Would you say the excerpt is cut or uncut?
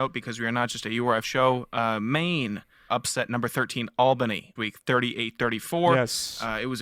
cut